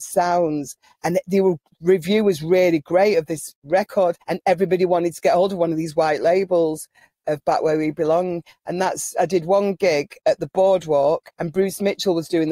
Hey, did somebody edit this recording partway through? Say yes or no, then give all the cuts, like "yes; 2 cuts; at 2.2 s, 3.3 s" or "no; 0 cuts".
yes; 2 cuts; at 4.2 s, 11.3 s